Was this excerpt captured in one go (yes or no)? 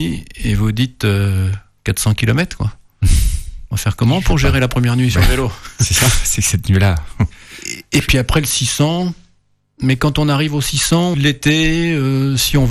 no